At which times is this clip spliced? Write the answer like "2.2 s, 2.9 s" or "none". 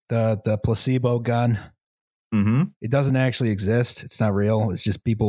none